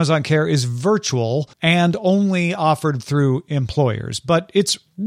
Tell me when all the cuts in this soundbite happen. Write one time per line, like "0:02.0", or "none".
0:01.5